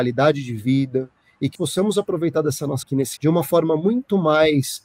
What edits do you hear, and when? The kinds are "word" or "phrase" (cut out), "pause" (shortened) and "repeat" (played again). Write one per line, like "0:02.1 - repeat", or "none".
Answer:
0:01.5 - word
0:02.8 - word
0:03.2 - word